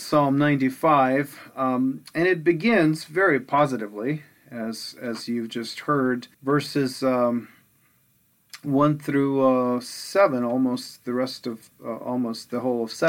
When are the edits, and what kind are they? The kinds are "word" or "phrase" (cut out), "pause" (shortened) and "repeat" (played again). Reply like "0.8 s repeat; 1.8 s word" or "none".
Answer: 6.3 s pause